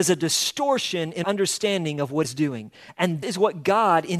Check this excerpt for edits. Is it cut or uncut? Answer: cut